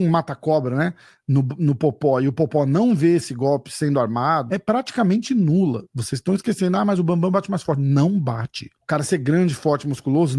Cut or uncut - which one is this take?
cut